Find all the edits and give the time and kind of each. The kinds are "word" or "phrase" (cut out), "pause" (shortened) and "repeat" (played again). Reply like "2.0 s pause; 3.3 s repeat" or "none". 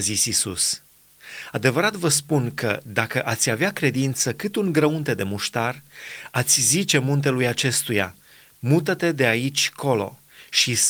none